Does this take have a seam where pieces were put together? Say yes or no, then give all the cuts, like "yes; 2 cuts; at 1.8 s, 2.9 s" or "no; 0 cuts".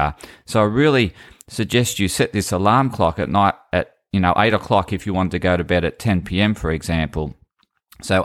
no; 0 cuts